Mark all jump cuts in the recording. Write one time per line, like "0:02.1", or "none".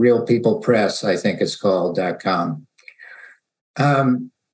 none